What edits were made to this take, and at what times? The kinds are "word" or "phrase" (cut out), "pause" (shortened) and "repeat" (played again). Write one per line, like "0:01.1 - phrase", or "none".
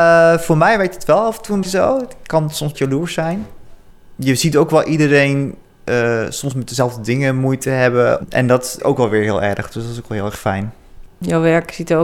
0:01.6 - word
0:02.7 - word
0:08.8 - word
0:11.1 - pause